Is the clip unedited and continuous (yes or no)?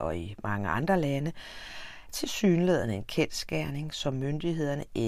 no